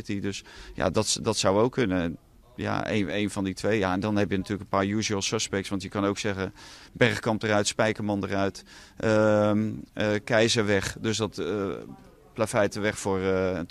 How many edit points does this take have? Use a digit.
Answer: 0